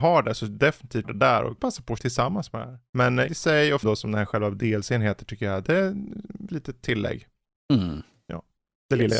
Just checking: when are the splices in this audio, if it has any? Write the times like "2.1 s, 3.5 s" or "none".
1.0 s, 1.6 s, 2.0 s, 3.3 s, 3.8 s, 6.5 s